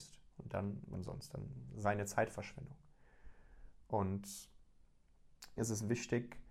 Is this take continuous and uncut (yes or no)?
no